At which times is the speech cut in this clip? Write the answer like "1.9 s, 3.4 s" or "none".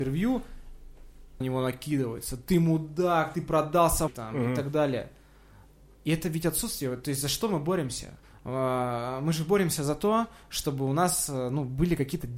1.4 s, 3.3 s, 4.1 s, 8.2 s